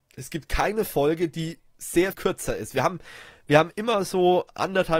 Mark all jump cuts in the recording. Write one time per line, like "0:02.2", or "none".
0:02.1